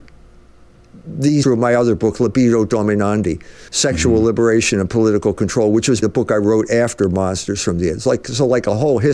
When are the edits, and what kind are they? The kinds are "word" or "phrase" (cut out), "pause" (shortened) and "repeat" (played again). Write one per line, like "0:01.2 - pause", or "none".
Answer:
0:01.4 - word
0:03.7 - pause
0:06.0 - word